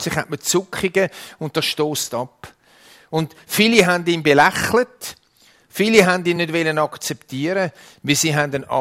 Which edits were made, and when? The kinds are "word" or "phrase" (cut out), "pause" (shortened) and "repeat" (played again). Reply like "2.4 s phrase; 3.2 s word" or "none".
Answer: none

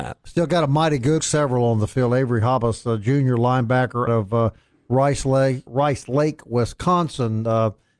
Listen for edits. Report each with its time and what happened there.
1.2 s phrase; 4.1 s word; 5.7 s word

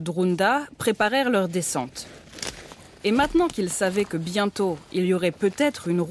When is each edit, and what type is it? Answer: none

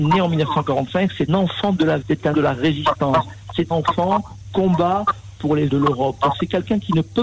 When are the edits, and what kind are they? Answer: 1.3 s word; 2.0 s word; 2.3 s word; 3.7 s word; 4.5 s word; 5.7 s word

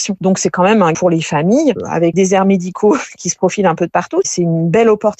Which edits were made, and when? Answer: 0.9 s phrase; 2.1 s phrase

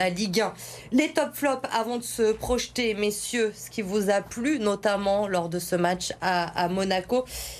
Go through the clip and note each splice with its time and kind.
none

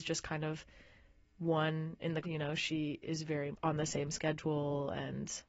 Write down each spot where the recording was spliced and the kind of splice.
2.2 s word; 3.5 s word

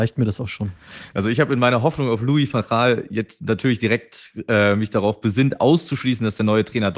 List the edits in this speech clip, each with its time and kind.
none

